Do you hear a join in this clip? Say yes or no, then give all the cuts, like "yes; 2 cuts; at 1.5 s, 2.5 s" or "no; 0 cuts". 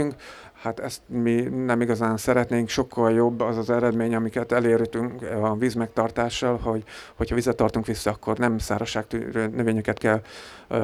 no; 0 cuts